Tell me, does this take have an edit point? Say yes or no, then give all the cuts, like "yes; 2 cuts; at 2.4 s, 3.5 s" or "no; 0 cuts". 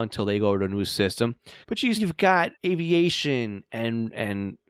yes; 3 cuts; at 1.6 s, 2.0 s, 2.5 s